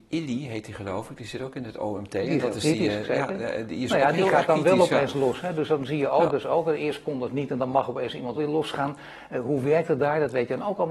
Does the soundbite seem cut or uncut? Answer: cut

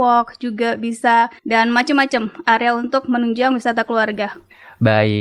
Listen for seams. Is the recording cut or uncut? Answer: cut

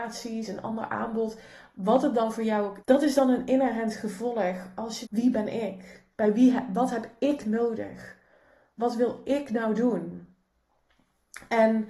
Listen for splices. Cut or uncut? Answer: cut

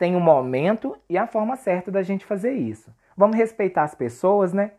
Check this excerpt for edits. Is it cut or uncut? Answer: uncut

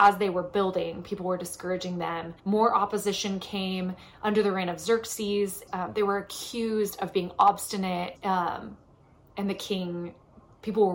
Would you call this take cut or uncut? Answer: cut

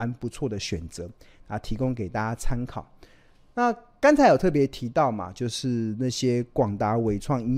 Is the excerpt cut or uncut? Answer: uncut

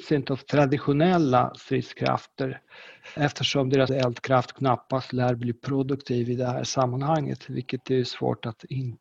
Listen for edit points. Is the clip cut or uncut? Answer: cut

